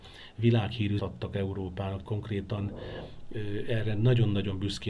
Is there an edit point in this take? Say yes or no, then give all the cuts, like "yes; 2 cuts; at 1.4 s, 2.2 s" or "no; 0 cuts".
yes; 2 cuts; at 1.0 s, 2.0 s